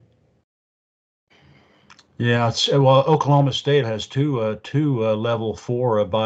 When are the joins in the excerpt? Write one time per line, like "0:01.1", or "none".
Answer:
0:03.8